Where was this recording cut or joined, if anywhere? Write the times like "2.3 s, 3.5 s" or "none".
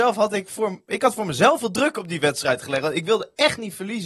1.6 s